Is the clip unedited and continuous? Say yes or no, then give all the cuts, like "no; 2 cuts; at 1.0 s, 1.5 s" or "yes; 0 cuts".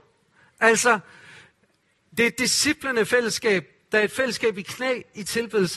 yes; 0 cuts